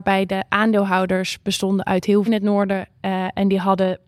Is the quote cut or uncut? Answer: cut